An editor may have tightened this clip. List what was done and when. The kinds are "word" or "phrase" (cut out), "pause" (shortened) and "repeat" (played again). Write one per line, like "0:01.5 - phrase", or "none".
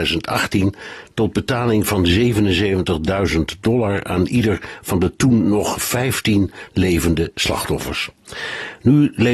none